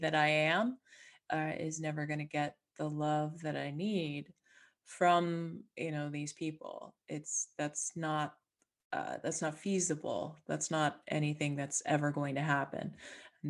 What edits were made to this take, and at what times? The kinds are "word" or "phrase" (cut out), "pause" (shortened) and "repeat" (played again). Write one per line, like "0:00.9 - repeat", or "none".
none